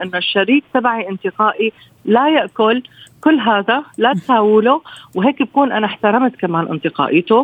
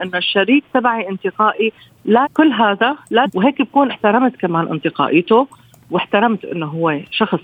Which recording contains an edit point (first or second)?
second